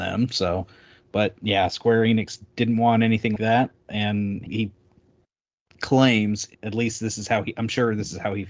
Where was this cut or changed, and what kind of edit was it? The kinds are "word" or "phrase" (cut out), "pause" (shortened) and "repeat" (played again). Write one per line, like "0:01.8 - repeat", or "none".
0:03.4 - word
0:04.5 - word
0:06.5 - word